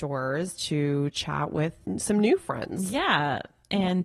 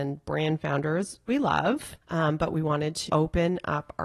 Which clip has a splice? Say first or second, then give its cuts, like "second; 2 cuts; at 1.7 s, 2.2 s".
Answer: second; 3 cuts; at 1.3 s, 2.0 s, 3.1 s